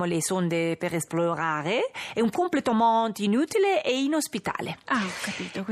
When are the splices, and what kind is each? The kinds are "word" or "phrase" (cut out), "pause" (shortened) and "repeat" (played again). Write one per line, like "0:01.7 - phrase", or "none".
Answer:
0:02.3 - word